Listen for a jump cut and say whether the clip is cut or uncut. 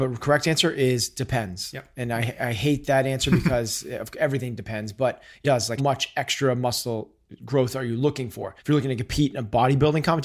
cut